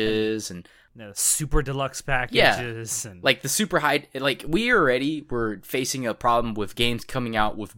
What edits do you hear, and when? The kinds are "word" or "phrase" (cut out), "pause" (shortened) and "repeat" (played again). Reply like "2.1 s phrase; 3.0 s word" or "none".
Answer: none